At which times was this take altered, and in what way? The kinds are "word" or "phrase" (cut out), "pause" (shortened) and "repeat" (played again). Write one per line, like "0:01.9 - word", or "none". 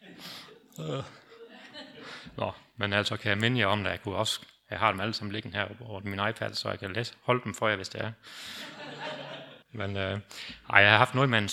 0:09.6 - pause